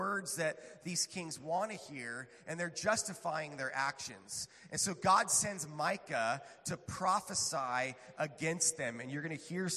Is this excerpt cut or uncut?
uncut